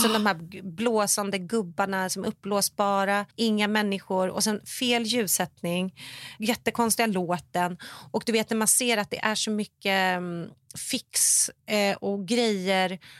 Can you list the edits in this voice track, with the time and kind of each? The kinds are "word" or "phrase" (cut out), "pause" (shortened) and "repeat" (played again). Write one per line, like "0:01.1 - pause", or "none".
0:03.3 - pause
0:06.4 - word